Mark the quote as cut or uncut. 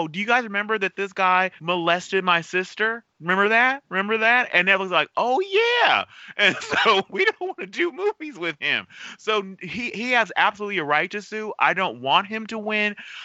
cut